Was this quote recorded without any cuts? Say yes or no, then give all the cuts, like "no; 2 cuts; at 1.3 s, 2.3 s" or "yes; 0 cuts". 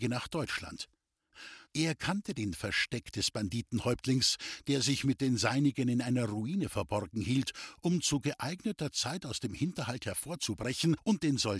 yes; 0 cuts